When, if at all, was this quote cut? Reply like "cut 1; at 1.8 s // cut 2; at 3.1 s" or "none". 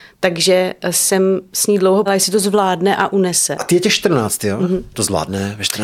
cut 1; at 2.1 s